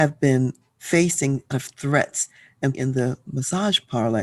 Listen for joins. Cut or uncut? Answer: cut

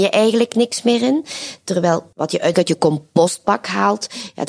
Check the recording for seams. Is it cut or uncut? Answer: cut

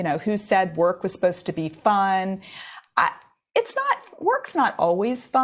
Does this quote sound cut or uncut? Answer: uncut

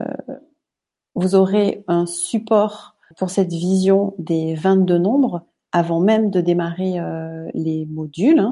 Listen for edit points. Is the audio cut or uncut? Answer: cut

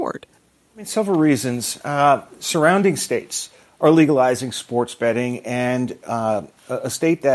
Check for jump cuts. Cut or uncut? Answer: uncut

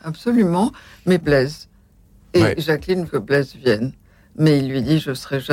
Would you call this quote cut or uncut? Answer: cut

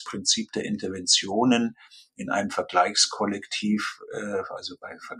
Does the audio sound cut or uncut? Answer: uncut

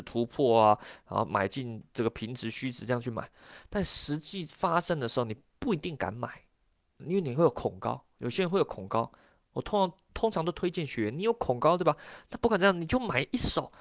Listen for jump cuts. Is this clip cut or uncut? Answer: uncut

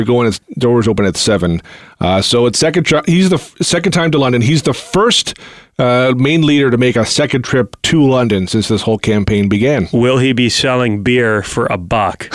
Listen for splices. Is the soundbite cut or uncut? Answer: cut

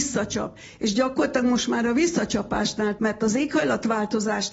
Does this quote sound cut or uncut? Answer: cut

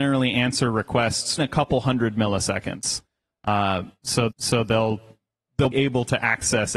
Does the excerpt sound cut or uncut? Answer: cut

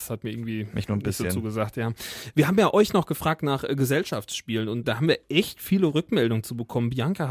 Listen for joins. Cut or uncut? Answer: cut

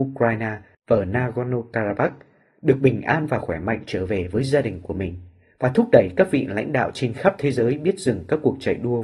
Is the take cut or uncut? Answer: uncut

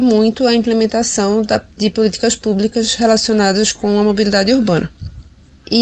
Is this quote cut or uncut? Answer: uncut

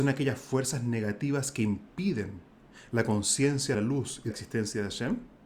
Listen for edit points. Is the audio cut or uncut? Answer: cut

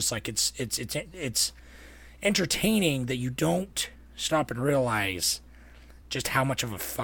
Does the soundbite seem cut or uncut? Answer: uncut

